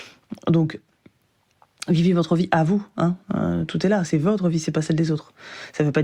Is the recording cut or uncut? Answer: uncut